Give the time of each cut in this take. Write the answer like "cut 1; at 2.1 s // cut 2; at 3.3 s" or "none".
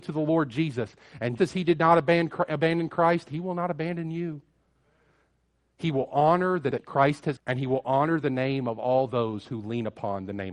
cut 1; at 1.4 s // cut 2; at 6.7 s // cut 3; at 7.4 s

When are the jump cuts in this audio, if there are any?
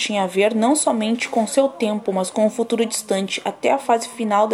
none

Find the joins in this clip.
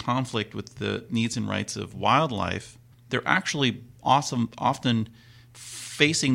cut 1; at 2.9 s

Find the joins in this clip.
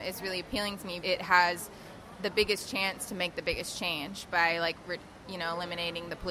cut 1; at 1.0 s // cut 2; at 4.3 s

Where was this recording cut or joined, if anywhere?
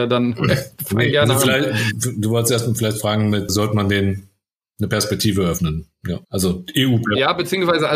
cut 1; at 3.5 s // cut 2; at 6.2 s

